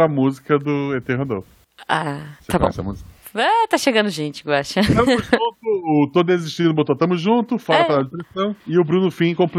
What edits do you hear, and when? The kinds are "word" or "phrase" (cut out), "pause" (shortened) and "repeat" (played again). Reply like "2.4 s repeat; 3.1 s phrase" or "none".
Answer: 2.4 s pause; 8.6 s pause